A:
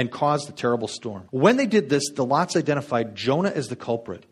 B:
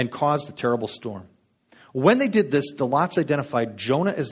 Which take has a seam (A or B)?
A